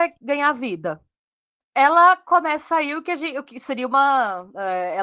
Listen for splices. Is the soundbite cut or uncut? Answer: uncut